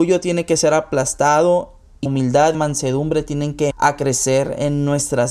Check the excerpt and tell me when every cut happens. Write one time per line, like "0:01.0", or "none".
0:02.1
0:02.5
0:03.7